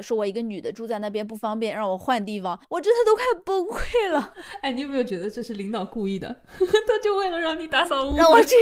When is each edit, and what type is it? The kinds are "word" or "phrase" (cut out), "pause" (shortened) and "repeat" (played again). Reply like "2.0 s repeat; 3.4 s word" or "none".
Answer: 2.6 s pause